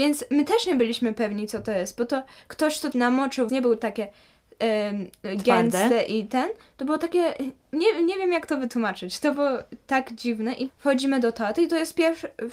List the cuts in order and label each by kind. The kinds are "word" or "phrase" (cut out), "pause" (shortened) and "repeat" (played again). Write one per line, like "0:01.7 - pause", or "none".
0:02.9 - word
0:03.5 - word
0:10.7 - word

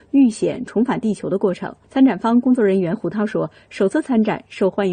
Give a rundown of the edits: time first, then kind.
0:01.8 - pause

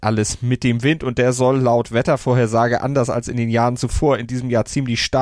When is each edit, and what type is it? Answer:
none

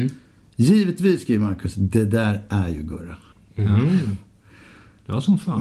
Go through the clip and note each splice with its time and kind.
0:03.3 - pause

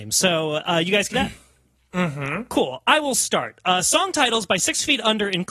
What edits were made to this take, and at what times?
0:01.1 - word

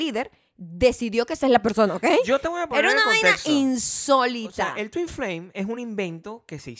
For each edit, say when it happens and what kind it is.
none

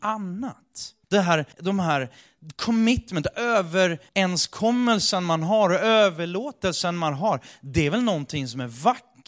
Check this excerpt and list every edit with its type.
0:01.0 - pause
0:01.5 - pause
0:04.1 - pause

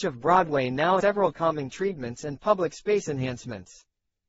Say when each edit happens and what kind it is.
0:01.0 - word
0:01.3 - word

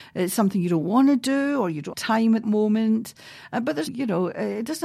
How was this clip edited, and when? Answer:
0:01.9 - word
0:02.4 - word
0:03.9 - word

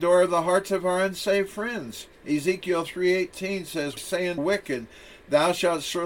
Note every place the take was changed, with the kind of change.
0:02.1 - pause
0:04.0 - phrase
0:04.4 - word

